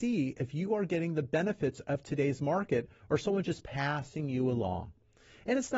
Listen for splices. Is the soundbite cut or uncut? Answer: uncut